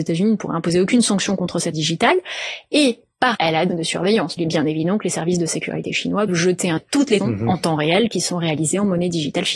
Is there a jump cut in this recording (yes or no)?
yes